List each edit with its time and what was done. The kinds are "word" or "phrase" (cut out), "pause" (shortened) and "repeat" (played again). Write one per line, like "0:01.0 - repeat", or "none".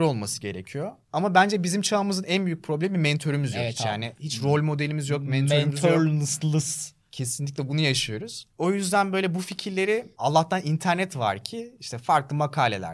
0:01.0 - pause
0:08.5 - pause
0:10.1 - pause